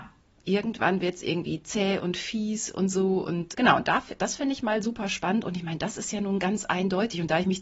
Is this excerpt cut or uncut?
cut